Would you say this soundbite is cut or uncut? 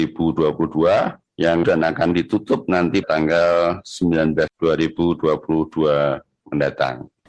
cut